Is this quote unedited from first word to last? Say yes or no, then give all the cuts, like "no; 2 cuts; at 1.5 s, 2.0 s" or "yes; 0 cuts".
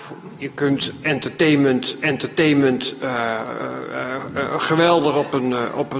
no; 1 cut; at 2.0 s